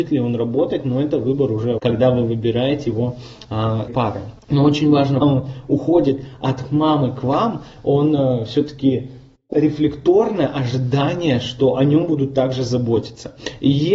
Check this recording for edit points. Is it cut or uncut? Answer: cut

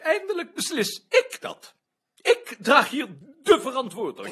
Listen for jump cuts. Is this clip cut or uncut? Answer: uncut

